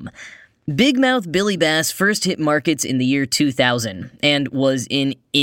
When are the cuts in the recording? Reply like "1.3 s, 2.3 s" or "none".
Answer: none